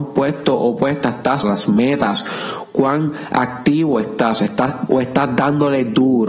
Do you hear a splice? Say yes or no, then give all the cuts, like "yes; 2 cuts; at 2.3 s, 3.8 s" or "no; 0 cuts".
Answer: yes; 2 cuts; at 1.4 s, 4.9 s